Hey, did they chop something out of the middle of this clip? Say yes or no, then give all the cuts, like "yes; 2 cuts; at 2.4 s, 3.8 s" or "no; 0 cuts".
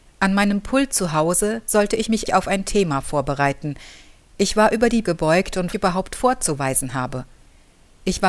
yes; 3 cuts; at 2.3 s, 5.0 s, 5.7 s